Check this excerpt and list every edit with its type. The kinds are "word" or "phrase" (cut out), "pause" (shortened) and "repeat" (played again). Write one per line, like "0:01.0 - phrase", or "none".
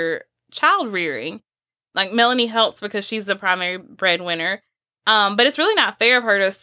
none